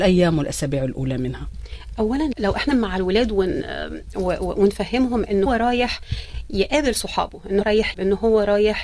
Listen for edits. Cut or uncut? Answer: cut